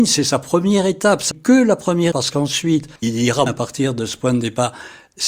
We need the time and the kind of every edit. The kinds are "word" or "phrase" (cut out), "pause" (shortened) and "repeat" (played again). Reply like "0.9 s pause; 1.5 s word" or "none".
1.3 s word; 2.1 s word; 3.0 s pause; 3.5 s phrase